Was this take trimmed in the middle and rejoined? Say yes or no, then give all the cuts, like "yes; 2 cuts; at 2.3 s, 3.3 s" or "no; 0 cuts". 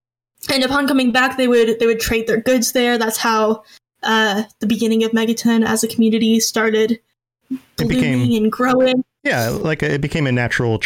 no; 0 cuts